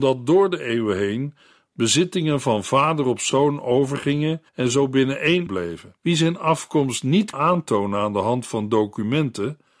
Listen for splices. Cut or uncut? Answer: cut